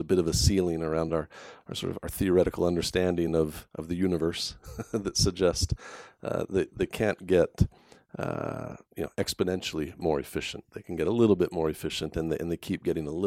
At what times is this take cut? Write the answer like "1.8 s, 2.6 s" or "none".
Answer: none